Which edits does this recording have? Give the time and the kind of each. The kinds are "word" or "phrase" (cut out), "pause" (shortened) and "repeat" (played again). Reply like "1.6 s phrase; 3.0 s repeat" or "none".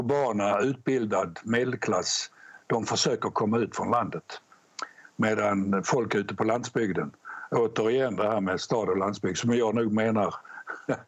none